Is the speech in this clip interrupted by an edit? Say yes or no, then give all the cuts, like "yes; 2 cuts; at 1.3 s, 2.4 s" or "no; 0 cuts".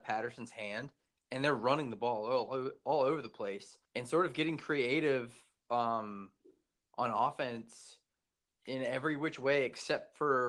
yes; 1 cut; at 3.8 s